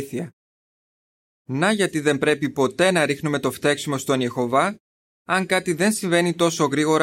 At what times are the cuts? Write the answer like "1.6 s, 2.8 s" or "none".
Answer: none